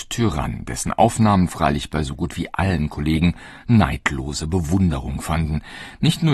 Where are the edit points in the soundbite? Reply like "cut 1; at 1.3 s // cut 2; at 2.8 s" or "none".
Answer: none